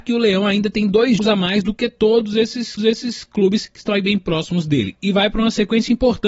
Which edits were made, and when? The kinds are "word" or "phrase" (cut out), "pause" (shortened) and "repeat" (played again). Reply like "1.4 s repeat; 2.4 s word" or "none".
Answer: 1.2 s word; 2.8 s repeat